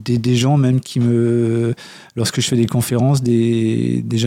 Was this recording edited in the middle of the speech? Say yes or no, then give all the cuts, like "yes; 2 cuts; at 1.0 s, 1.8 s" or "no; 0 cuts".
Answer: no; 0 cuts